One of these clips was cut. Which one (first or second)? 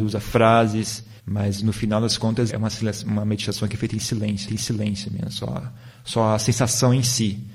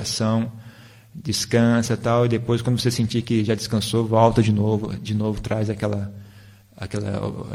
first